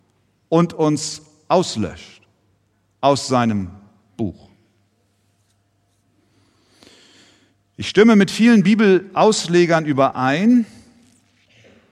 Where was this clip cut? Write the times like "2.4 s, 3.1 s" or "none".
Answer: none